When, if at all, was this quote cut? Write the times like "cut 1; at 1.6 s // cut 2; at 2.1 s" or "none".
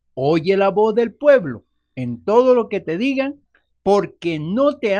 none